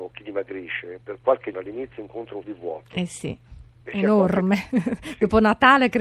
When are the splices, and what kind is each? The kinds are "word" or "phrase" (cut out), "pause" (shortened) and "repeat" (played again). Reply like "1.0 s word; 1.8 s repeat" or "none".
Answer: 1.0 s word; 1.5 s word; 2.4 s word

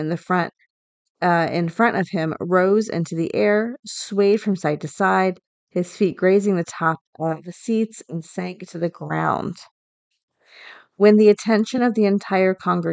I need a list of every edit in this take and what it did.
none

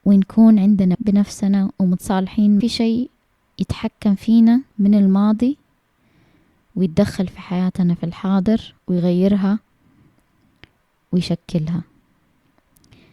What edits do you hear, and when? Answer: 0.9 s word; 2.6 s phrase; 4.7 s pause; 8.8 s pause

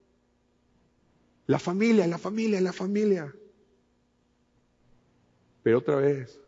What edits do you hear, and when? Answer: none

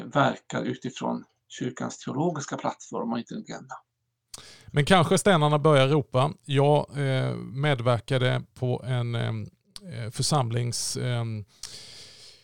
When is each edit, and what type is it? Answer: 3.4 s word

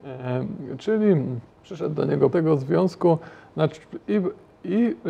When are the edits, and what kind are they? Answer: 1.5 s pause; 2.3 s word

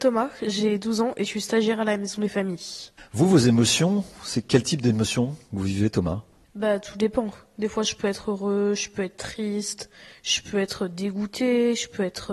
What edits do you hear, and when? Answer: none

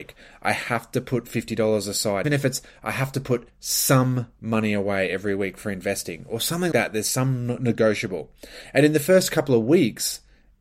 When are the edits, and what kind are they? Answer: 2.2 s word; 3.5 s pause; 6.7 s word

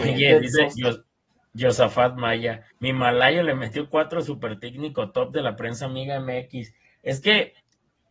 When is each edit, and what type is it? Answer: 2.7 s pause

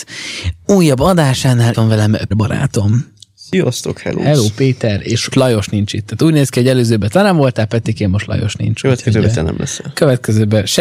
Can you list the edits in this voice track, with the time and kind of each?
1.7 s word; 2.3 s word; 5.3 s word

